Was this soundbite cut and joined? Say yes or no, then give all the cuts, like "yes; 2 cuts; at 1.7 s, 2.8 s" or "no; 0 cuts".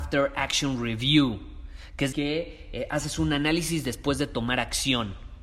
yes; 1 cut; at 2.1 s